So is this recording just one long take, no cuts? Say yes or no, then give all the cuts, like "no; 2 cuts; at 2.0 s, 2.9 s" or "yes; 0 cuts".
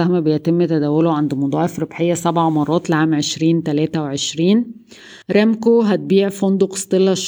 no; 1 cut; at 5.2 s